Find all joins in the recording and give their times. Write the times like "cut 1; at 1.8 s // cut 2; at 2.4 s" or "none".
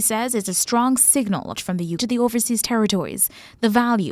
cut 1; at 1.6 s // cut 2; at 2.0 s

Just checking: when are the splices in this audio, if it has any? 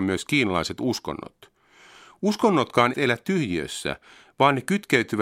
cut 1; at 2.9 s

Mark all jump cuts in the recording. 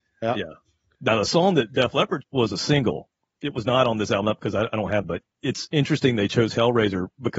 cut 1; at 2.2 s // cut 2; at 4.2 s // cut 3; at 5.0 s

